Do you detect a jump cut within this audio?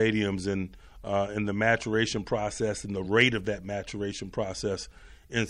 no; 0 cuts

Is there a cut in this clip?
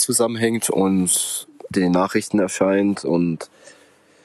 yes; 1 cut; at 1.7 s

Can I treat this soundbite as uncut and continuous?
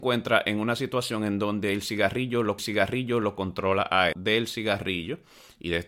no; 2 cuts; at 2.6 s, 4.1 s

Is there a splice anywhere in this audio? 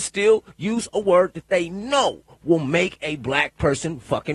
no; 0 cuts

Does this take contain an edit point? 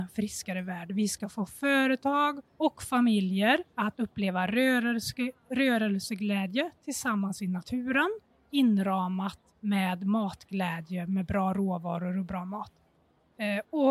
yes; 3 cuts; at 2.5 s, 3.7 s, 9.5 s

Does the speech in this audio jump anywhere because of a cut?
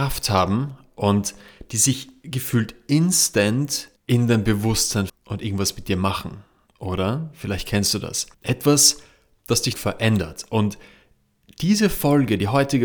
yes; 4 cuts; at 4.0 s, 5.1 s, 8.3 s, 9.7 s

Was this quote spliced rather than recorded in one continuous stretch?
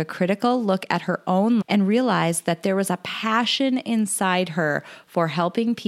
yes; 1 cut; at 1.6 s

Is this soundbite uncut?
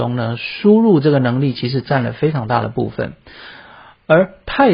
yes; 0 cuts

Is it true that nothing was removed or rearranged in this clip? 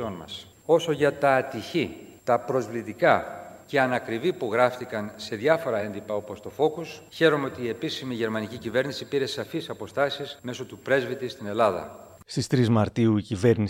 yes; 0 cuts

